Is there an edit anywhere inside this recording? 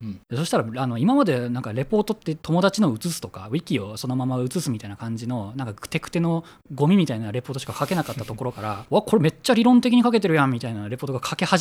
no; 0 cuts

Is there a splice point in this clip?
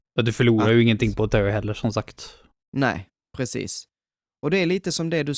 no; 0 cuts

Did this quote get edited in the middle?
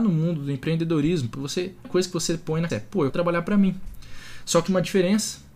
yes; 5 cuts; at 1.3 s, 1.8 s, 2.7 s, 3.1 s, 4.7 s

